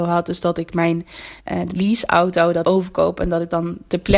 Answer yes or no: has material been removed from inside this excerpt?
yes